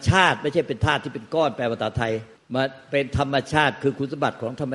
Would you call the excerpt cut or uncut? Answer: cut